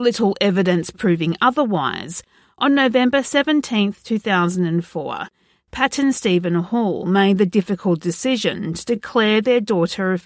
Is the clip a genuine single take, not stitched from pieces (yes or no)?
yes